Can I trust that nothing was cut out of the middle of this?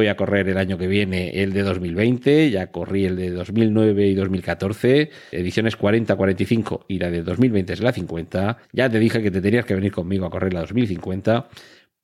no; 2 cuts; at 5.3 s, 8.6 s

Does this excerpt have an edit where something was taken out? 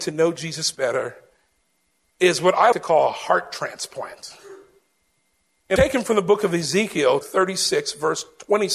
yes; 3 cuts; at 2.7 s, 5.8 s, 7.2 s

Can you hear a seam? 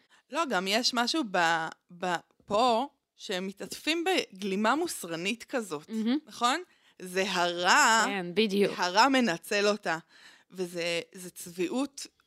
no; 0 cuts

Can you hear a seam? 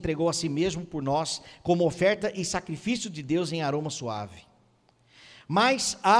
no; 0 cuts

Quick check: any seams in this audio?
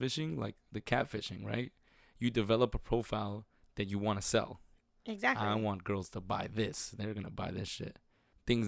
no; 0 cuts

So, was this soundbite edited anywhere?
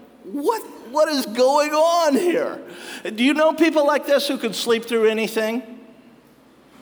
no; 0 cuts

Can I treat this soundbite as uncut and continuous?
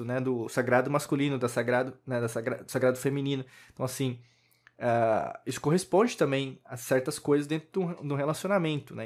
yes; 0 cuts

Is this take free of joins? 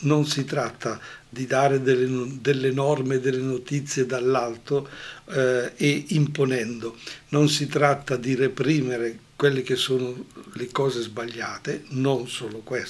no; 1 cut; at 9.2 s

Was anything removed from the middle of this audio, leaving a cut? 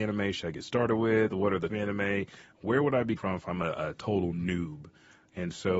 yes; 2 cuts; at 1.7 s, 3.2 s

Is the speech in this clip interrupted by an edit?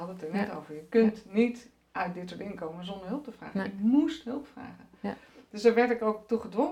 no; 0 cuts

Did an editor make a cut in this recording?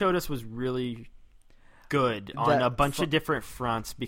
no; 0 cuts

